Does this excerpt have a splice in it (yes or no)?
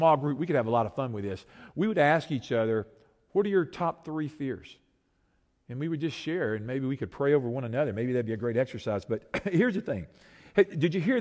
no